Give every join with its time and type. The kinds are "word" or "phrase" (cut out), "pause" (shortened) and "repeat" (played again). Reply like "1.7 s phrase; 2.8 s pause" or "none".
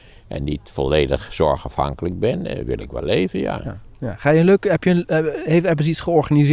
none